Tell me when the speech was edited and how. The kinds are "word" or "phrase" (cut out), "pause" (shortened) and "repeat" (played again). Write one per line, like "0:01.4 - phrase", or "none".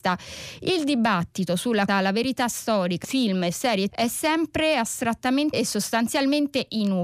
0:01.9 - word
0:03.0 - word
0:03.9 - word
0:05.5 - word